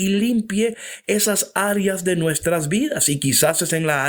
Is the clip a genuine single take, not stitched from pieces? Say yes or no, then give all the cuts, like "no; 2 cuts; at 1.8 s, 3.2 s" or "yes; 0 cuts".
yes; 0 cuts